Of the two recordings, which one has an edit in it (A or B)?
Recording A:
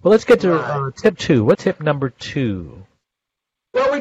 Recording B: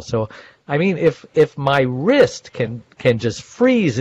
A